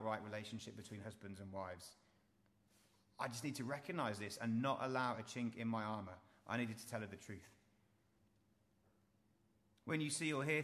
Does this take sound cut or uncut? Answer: uncut